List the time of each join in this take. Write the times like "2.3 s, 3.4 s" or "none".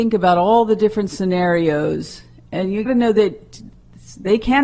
2.9 s

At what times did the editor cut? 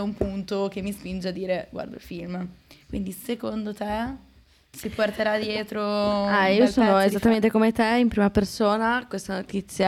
none

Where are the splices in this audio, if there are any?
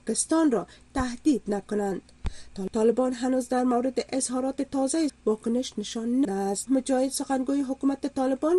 5.1 s, 6.2 s, 6.7 s

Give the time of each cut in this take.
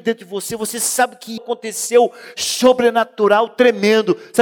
1.4 s

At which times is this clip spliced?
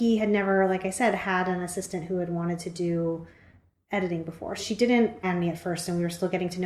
4.6 s, 5.2 s

